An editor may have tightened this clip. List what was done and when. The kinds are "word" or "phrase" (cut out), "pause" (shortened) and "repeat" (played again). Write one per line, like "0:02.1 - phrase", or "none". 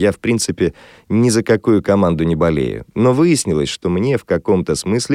none